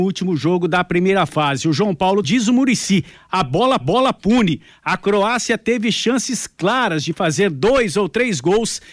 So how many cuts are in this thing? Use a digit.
2